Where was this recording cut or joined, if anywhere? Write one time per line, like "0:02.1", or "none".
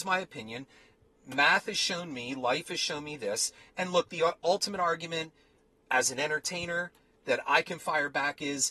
none

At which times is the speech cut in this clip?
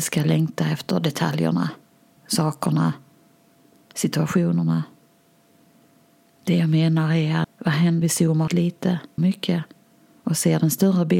0:02.2
0:07.4
0:08.0
0:08.5
0:09.2

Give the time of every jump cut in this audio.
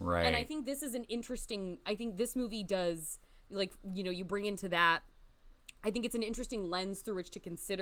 none

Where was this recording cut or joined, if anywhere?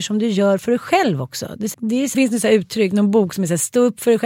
0:01.7
0:02.1

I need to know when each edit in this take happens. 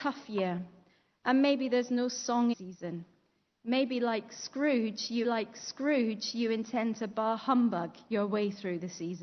0:02.5
0:05.2

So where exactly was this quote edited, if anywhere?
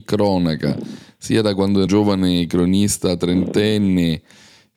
0:01.9

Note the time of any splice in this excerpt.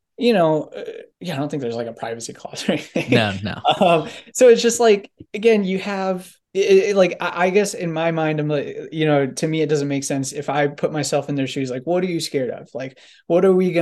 0:01.1
0:05.3
0:06.4

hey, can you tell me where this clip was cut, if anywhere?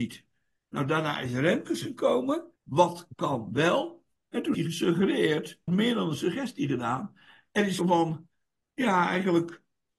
0:02.6
0:04.5
0:05.7
0:07.8

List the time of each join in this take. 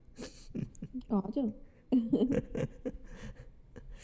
none

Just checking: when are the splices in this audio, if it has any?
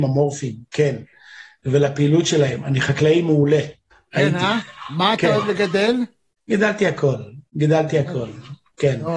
0:03.9
0:06.4
0:07.5

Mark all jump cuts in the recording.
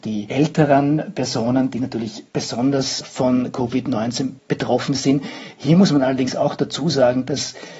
0:02.3
0:04.4

